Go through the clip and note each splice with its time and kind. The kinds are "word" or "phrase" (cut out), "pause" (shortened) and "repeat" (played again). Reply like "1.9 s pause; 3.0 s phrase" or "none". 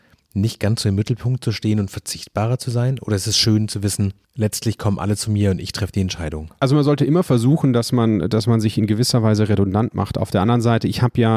none